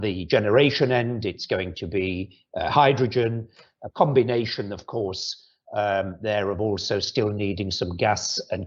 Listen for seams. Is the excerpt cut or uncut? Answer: uncut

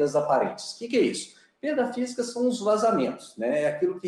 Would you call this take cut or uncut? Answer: uncut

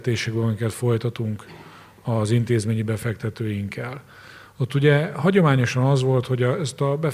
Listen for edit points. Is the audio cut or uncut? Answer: uncut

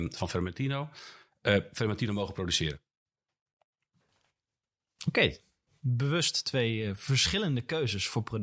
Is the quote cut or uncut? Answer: uncut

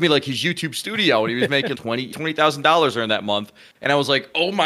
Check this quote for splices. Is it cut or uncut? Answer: cut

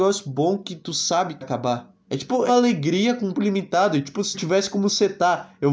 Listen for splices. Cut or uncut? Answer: cut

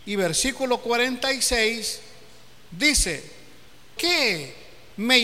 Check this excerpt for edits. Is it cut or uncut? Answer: cut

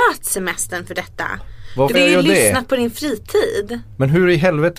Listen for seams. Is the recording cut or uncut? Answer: cut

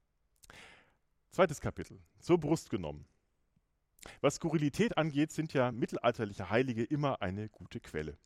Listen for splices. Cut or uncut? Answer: uncut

